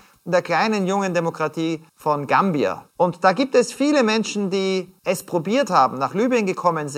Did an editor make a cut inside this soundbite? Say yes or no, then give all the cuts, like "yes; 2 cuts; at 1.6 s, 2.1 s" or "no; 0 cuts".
yes; 3 cuts; at 1.9 s, 2.9 s, 5.0 s